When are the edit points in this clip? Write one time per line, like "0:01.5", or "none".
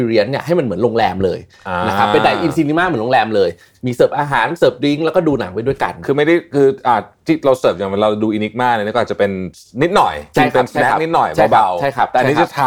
none